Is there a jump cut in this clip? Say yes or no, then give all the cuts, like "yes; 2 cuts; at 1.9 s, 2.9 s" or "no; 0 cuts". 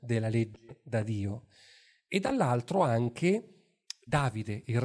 no; 0 cuts